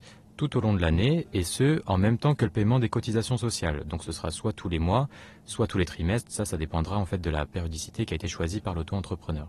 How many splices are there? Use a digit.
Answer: 0